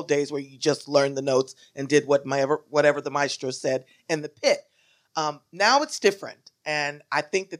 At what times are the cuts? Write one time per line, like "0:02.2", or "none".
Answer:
none